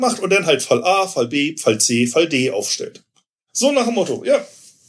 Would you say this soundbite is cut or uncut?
uncut